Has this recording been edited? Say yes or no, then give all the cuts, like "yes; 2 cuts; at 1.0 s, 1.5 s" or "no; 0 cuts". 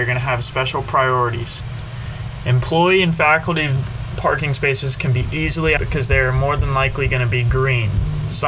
yes; 1 cut; at 5.8 s